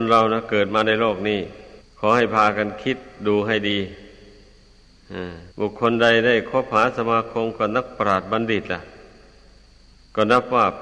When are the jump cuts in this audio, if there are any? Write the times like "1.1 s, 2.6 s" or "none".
1.8 s, 5.5 s